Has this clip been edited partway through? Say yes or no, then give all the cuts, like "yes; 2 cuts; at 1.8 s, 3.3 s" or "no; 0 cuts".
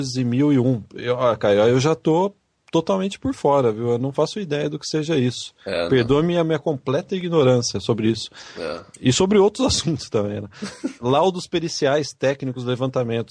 no; 0 cuts